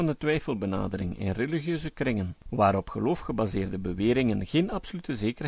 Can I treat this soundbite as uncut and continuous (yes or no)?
no